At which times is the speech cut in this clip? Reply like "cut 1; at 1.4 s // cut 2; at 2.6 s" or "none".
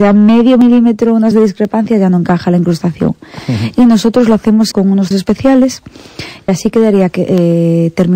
cut 1; at 1.3 s // cut 2; at 4.7 s // cut 3; at 5.1 s // cut 4; at 6.5 s